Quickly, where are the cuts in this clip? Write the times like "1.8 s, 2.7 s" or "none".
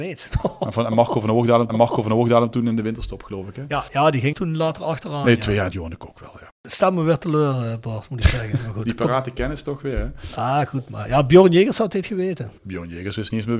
1.7 s, 4.3 s, 5.7 s, 6.6 s, 12.6 s

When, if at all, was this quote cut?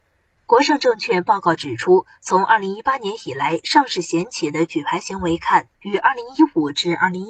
5.7 s

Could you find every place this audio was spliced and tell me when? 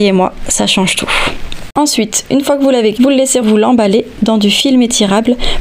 2.9 s, 3.4 s

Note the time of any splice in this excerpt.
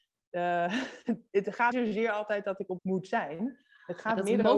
1.7 s, 2.8 s

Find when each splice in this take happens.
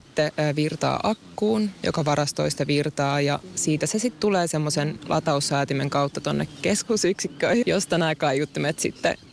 7.6 s

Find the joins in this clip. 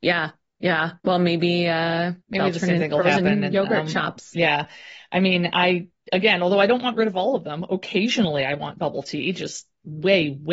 1.0 s, 2.2 s

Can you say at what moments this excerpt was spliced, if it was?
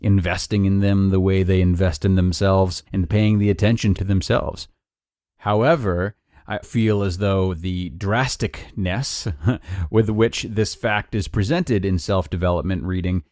2.9 s, 4.0 s, 6.6 s

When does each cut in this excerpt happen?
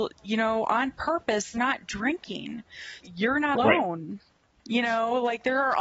1.5 s, 3.0 s, 3.5 s

